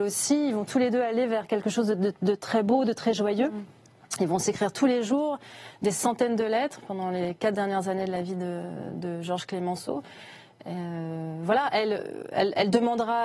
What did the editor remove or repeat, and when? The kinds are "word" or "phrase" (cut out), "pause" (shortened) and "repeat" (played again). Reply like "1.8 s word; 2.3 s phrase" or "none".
none